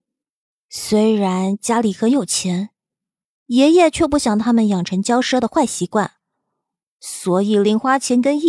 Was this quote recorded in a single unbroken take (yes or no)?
yes